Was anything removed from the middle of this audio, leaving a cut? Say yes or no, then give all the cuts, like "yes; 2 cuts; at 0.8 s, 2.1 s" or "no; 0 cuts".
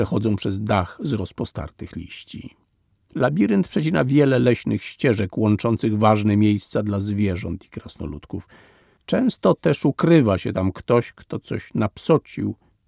no; 0 cuts